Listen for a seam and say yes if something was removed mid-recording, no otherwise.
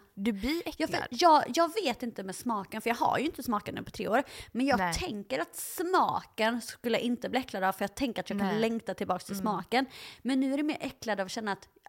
no